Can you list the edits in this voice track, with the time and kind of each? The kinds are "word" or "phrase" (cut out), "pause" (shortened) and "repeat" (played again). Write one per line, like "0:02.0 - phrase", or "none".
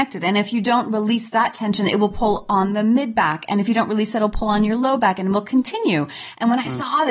none